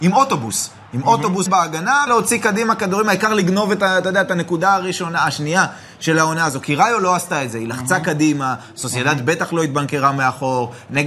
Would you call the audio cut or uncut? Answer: cut